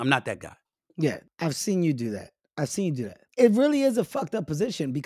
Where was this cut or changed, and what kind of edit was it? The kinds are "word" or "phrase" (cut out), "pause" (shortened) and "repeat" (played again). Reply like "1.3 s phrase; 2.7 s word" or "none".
none